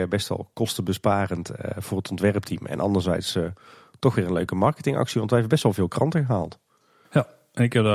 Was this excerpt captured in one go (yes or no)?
yes